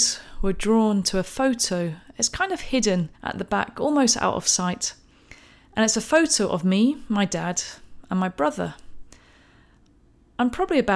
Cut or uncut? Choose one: cut